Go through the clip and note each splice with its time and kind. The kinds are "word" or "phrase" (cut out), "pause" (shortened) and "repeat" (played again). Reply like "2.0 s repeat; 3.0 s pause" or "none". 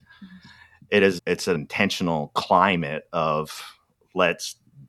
1.2 s word; 1.5 s phrase